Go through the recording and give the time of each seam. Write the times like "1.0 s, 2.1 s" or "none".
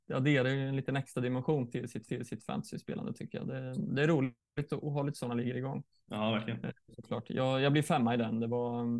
2.1 s